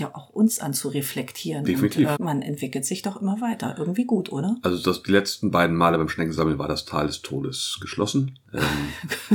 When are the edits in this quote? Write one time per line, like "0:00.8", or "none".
0:02.2
0:08.4